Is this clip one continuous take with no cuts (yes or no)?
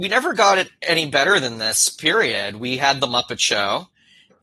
yes